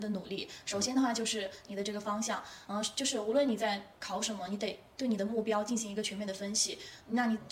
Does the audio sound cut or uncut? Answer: uncut